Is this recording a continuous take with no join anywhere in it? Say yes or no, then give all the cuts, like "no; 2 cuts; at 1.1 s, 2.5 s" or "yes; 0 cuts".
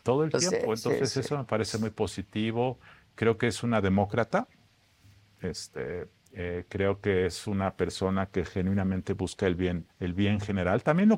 no; 1 cut; at 9.9 s